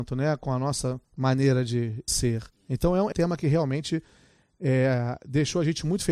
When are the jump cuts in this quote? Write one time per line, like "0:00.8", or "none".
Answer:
0:01.0
0:02.1
0:02.5
0:03.1